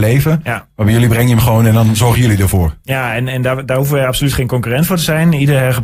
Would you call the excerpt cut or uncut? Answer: uncut